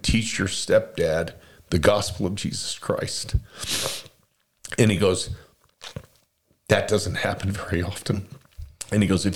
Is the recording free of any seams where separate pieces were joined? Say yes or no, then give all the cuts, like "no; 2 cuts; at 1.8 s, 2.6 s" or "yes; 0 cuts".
yes; 0 cuts